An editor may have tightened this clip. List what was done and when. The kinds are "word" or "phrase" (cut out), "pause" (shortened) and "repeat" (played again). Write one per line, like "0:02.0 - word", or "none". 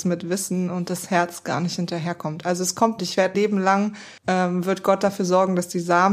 0:03.0 - phrase
0:03.3 - word
0:04.2 - pause